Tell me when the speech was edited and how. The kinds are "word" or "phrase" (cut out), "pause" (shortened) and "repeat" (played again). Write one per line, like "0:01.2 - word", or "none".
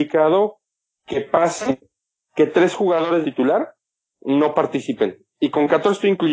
0:02.1 - pause
0:03.2 - phrase